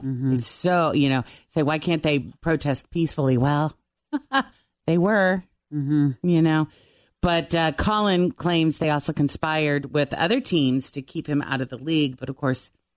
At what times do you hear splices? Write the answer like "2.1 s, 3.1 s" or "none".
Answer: none